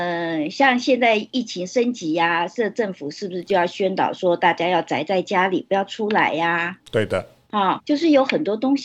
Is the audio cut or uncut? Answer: cut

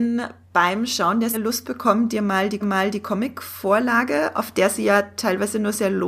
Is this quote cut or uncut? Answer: cut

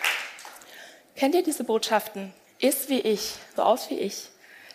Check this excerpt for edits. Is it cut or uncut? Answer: cut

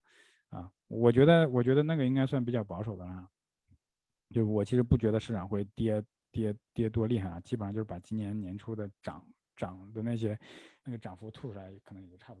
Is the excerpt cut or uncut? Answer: cut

